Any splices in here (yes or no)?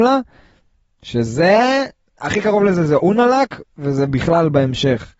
no